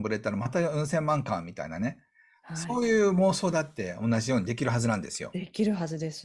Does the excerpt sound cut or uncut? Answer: uncut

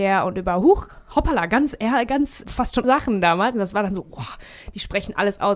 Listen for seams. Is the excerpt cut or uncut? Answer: cut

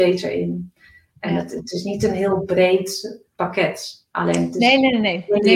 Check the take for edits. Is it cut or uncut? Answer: uncut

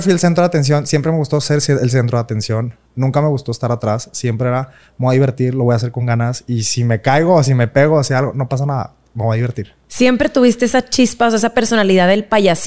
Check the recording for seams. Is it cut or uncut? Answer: uncut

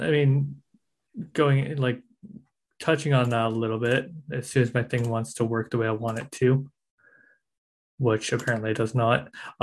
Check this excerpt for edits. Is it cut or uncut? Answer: uncut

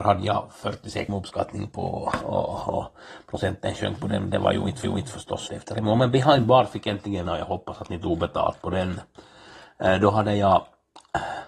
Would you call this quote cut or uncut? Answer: cut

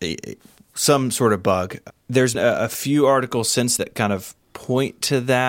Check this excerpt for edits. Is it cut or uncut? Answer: cut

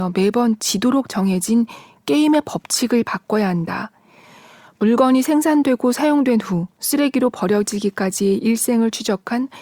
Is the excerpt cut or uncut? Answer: uncut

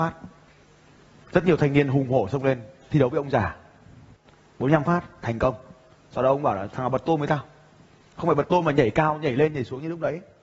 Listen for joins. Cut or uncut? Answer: uncut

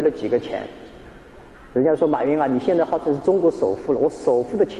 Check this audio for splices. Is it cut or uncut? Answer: uncut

